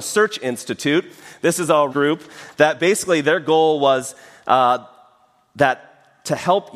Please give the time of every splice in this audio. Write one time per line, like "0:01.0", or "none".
0:01.9